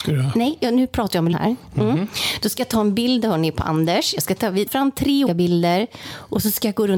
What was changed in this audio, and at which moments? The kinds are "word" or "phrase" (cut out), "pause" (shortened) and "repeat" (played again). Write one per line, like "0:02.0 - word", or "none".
0:01.3 - word
0:04.7 - word
0:05.3 - word